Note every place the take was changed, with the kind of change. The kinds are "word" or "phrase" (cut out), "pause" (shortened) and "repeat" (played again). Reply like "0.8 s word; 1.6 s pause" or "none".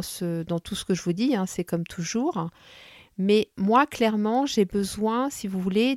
none